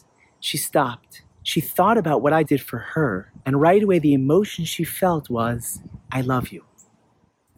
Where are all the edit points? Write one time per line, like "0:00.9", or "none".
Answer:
0:01.3
0:02.4
0:03.4
0:06.0